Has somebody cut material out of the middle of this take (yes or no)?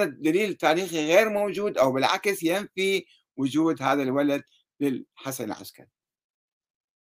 no